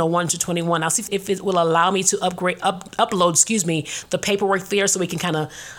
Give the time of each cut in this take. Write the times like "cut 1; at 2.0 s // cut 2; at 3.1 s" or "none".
cut 1; at 1.1 s